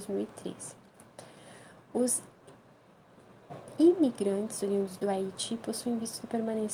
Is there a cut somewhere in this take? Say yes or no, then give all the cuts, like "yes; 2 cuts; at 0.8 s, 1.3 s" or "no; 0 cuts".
no; 0 cuts